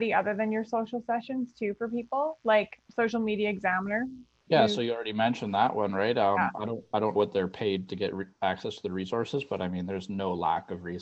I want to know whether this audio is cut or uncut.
cut